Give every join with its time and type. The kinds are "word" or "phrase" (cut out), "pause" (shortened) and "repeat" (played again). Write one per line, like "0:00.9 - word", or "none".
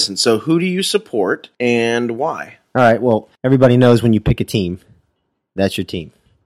0:01.5 - pause
0:03.3 - pause